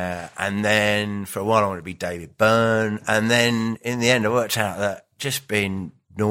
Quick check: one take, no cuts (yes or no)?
yes